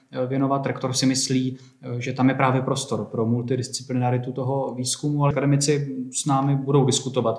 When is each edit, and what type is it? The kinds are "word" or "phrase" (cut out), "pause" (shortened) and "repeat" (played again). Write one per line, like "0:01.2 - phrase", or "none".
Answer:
0:05.3 - word